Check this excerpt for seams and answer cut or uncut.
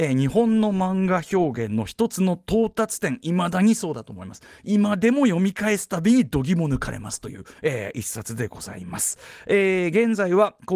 cut